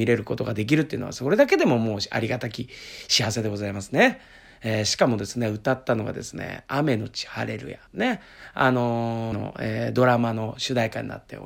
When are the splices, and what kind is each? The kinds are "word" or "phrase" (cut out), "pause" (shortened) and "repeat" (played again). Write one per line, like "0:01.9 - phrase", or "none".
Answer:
0:07.9 - pause
0:09.3 - word